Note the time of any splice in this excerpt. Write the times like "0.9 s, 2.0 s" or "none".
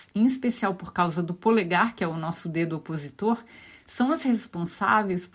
none